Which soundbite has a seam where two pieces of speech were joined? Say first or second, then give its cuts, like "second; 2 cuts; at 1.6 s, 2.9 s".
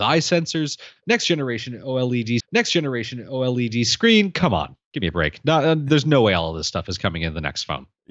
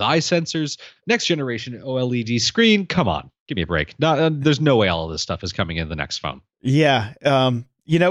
first; 1 cut; at 2.4 s